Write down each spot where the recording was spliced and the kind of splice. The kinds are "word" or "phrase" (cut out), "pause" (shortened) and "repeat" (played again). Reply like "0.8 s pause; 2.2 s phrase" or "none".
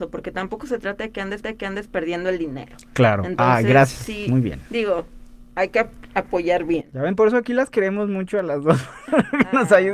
1.4 s repeat

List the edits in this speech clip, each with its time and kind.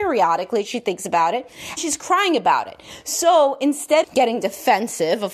1.8 s word; 4.0 s word

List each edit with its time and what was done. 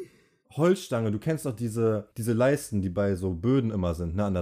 2.1 s pause

